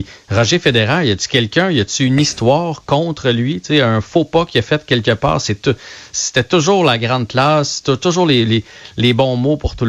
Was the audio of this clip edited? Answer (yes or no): no